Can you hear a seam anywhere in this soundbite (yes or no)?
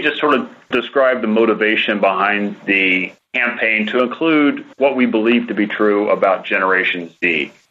yes